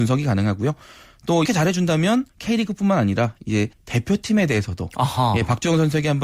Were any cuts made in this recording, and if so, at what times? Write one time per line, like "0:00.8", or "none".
0:01.5
0:02.3
0:03.7